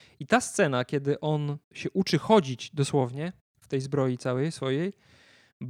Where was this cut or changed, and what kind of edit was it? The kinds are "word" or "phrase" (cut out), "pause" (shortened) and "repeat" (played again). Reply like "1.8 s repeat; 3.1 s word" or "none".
1.6 s pause